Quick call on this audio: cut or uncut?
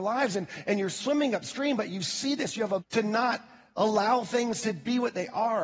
cut